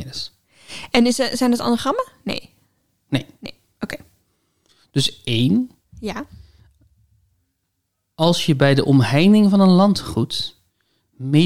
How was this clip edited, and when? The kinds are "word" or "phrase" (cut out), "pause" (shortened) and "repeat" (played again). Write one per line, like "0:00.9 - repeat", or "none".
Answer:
none